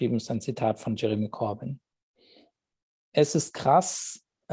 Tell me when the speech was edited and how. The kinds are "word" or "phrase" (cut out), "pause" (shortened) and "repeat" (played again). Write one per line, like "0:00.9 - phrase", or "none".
none